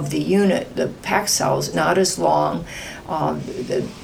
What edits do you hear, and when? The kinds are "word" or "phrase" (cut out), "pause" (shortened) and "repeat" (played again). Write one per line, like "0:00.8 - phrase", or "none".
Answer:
0:01.7 - word